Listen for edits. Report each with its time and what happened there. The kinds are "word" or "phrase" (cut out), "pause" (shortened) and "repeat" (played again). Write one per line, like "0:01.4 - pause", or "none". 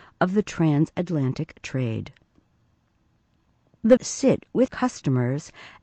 0:01.5 - word
0:04.0 - word
0:04.7 - word